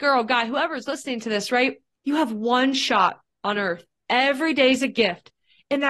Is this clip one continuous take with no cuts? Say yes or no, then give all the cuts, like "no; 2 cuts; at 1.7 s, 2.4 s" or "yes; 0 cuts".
no; 1 cut; at 1.9 s